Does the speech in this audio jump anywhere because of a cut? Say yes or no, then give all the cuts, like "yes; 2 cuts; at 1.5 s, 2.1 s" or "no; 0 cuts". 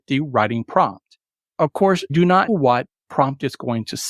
yes; 4 cuts; at 1.3 s, 2.1 s, 2.5 s, 3.0 s